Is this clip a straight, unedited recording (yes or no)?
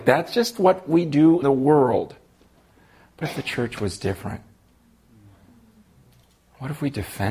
no